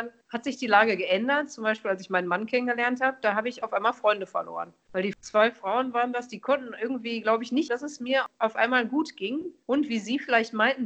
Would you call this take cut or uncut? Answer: cut